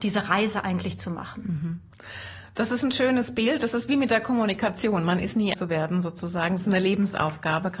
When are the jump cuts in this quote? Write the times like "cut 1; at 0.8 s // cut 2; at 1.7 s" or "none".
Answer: cut 1; at 5.5 s